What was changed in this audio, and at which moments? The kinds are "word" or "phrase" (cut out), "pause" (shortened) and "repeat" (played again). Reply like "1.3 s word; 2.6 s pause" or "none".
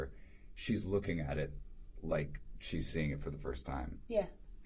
none